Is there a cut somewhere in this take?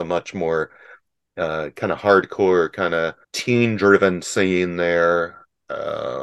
yes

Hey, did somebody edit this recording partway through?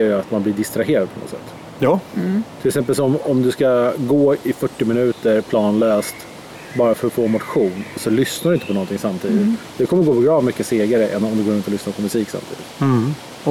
no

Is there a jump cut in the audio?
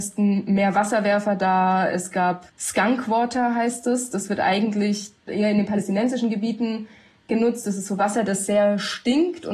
yes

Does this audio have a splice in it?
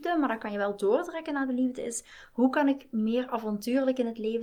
no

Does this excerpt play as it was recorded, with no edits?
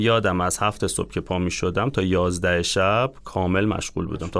yes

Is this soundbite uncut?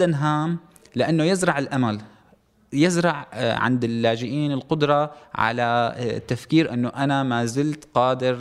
yes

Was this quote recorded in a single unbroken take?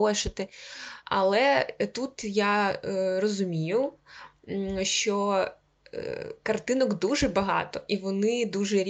yes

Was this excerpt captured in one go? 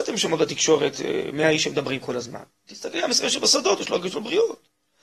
yes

